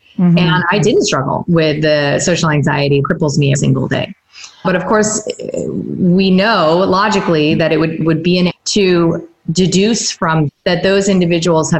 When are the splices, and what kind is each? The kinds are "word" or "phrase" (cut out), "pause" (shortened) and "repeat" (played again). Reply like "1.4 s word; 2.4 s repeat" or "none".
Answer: 3.0 s word; 3.5 s word; 4.6 s word; 8.0 s word; 8.5 s word; 10.5 s word